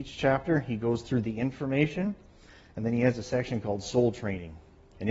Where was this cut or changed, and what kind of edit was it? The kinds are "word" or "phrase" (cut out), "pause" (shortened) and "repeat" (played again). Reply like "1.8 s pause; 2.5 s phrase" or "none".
none

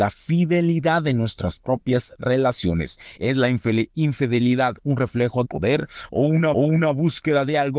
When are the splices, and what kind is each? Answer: 5.5 s phrase; 6.5 s repeat

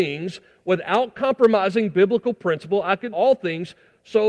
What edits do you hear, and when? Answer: 3.1 s word

